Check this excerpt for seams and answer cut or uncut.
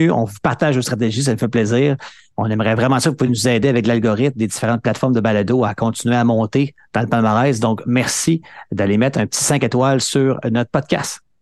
uncut